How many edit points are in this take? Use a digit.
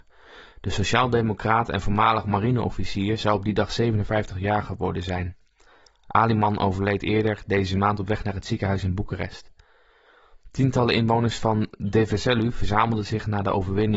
0